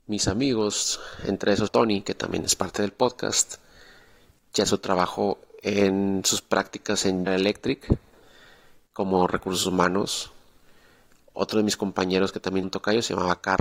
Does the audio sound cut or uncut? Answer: cut